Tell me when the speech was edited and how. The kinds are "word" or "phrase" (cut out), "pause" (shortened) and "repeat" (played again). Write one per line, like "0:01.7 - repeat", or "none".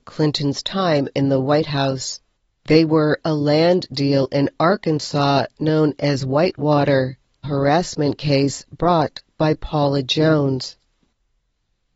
0:02.5 - pause
0:07.4 - phrase